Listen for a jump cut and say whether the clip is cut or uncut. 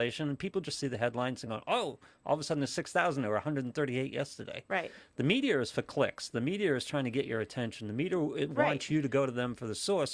uncut